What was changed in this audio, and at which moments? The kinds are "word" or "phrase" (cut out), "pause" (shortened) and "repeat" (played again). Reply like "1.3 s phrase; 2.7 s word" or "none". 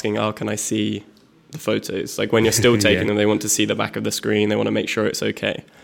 none

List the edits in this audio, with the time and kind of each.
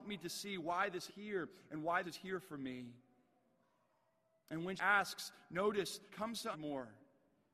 1.1 s word; 2.0 s word; 4.8 s word; 6.1 s word; 6.5 s word

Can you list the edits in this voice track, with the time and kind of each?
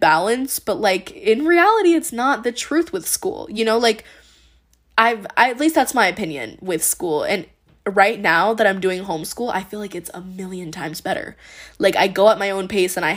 none

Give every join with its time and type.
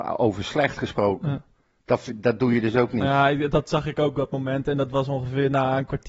none

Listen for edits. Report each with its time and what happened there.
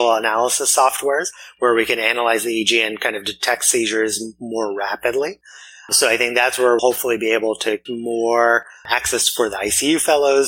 6.8 s word; 7.9 s word

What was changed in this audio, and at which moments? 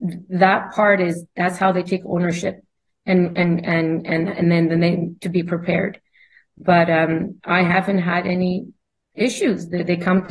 none

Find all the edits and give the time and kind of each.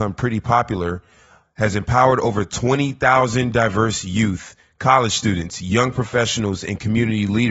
none

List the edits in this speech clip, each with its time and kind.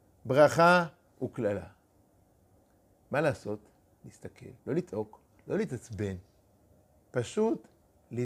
4.6 s pause

